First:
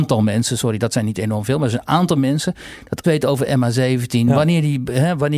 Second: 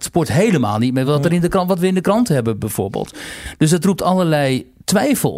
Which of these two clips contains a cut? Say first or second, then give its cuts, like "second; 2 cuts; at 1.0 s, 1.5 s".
first; 1 cut; at 3.0 s